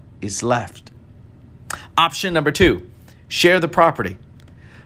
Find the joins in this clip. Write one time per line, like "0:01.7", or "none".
none